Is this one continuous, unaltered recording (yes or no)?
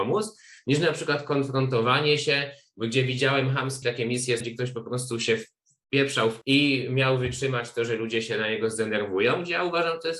no